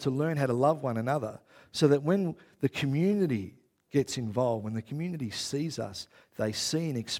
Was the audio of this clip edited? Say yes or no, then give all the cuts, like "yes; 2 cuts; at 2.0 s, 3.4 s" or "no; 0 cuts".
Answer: no; 0 cuts